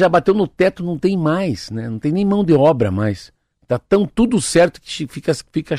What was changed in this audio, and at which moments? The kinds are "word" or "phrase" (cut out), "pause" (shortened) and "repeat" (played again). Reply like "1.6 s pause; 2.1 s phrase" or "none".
none